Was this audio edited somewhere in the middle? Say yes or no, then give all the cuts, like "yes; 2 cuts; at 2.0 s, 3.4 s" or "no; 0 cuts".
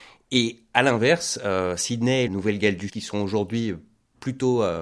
yes; 2 cuts; at 2.3 s, 2.9 s